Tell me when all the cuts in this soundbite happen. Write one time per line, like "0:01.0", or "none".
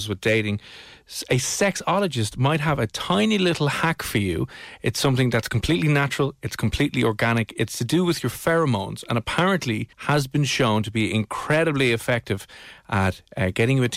0:09.9